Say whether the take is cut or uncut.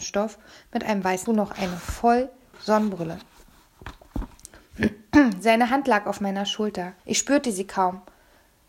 cut